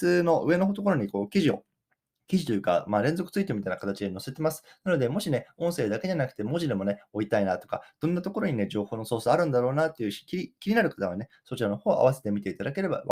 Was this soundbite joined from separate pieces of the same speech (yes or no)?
no